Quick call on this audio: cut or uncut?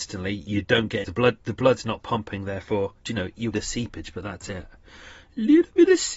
cut